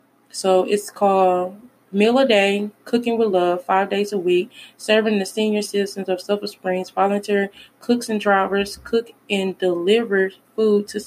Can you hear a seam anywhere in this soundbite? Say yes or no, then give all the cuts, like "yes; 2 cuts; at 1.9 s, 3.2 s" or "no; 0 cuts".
no; 0 cuts